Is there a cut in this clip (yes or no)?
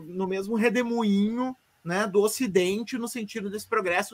no